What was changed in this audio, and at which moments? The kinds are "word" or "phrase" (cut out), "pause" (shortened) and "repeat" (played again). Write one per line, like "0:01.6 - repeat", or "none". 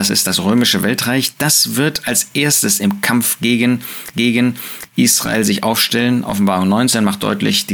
0:04.1 - repeat